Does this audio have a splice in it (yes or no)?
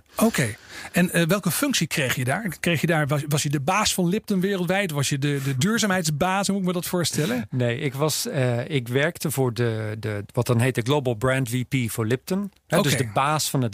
no